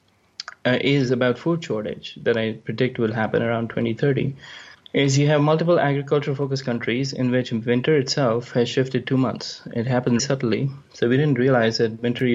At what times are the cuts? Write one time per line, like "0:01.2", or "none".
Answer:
0:04.7
0:10.2